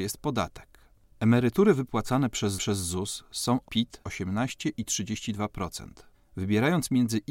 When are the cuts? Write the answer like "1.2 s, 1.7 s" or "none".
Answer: 2.6 s, 3.6 s, 4.0 s, 6.1 s

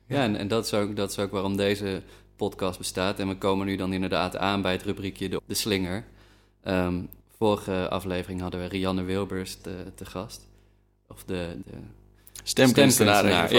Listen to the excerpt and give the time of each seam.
5.4 s, 7.2 s, 9.6 s, 11.6 s

